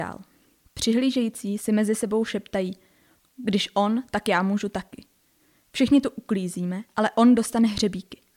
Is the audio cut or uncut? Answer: uncut